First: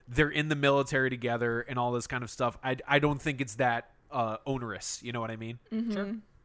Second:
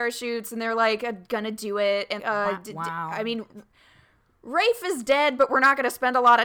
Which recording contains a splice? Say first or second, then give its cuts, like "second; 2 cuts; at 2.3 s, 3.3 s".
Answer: second; 1 cut; at 2.2 s